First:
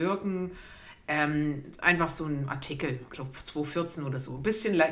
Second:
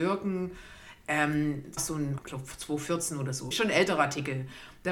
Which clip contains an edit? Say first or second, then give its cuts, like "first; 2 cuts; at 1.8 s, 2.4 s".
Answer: second; 3 cuts; at 1.8 s, 2.2 s, 3.5 s